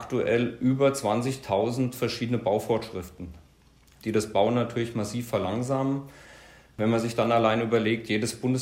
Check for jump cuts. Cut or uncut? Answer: uncut